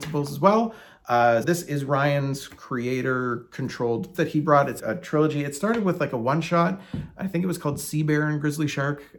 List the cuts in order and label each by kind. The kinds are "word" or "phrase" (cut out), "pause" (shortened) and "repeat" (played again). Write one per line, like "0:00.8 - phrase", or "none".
0:01.4 - word
0:04.1 - word
0:04.8 - word